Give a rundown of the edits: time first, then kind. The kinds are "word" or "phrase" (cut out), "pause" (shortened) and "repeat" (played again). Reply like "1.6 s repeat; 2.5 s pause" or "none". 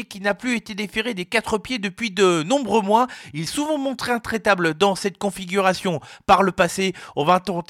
3.5 s word